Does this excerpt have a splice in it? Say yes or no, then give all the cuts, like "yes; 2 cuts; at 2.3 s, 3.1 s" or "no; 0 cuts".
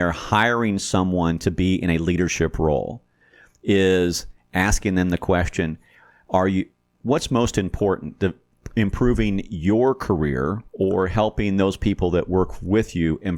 yes; 1 cut; at 10.7 s